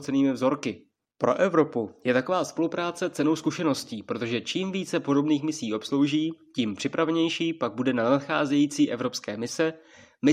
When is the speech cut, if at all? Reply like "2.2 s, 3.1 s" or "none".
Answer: none